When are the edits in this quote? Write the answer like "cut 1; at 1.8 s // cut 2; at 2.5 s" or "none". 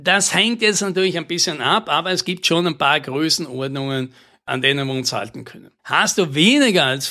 cut 1; at 5.8 s